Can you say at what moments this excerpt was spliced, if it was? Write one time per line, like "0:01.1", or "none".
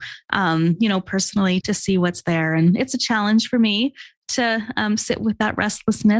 0:01.6